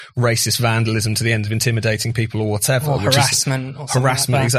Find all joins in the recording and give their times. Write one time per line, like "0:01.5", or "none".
none